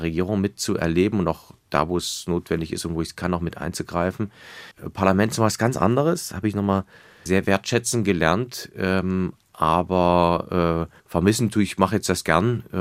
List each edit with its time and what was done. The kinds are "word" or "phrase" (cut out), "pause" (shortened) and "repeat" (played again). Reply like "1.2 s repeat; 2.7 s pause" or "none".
4.7 s pause; 7.3 s word; 11.0 s pause

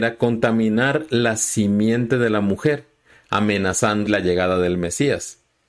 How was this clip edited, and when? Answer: 4.1 s word

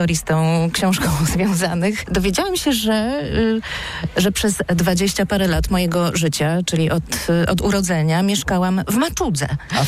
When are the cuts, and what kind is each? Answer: none

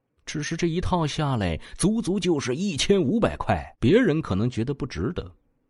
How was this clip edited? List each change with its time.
3.7 s pause

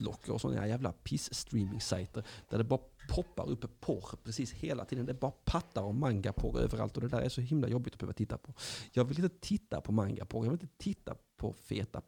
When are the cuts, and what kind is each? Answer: none

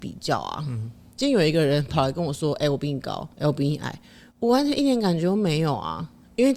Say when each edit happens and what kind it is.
3.3 s pause

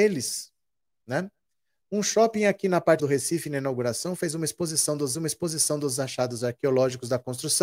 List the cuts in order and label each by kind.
3.0 s word; 5.1 s repeat

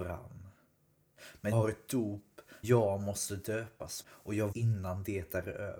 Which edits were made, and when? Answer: 1.5 s word; 2.6 s word; 4.0 s word; 4.5 s word

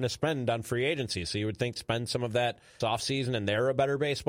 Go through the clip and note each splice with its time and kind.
1.8 s word; 2.8 s word

